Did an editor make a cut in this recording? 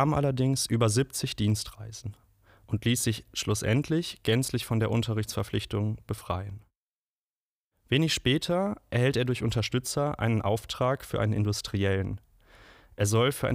no; 0 cuts

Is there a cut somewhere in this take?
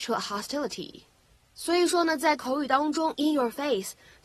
no; 0 cuts

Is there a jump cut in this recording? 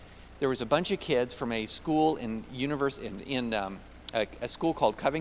no; 0 cuts

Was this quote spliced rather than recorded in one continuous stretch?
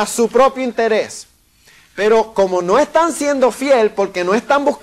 no; 0 cuts

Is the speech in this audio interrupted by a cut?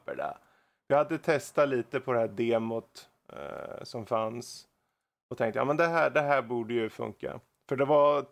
no; 0 cuts

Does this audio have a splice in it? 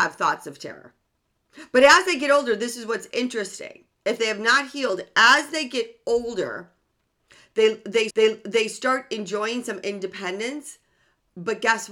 yes; 2 cuts; at 3.9 s, 8.1 s

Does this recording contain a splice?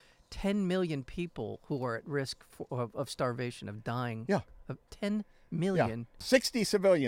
no; 0 cuts

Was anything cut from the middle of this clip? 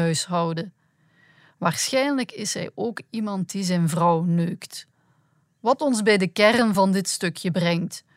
no; 0 cuts

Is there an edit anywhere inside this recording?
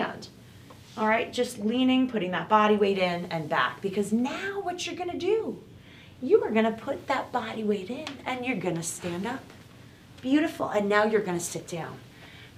no; 0 cuts

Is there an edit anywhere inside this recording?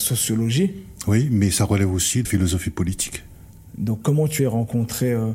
yes; 2 cuts; at 2.2 s, 4.4 s

